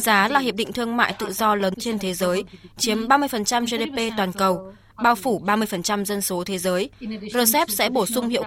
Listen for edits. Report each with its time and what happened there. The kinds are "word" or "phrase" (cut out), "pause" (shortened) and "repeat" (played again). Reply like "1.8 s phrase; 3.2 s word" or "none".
1.7 s word